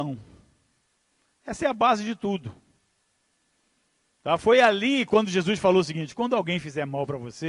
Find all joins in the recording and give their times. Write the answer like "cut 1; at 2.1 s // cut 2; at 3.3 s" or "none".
none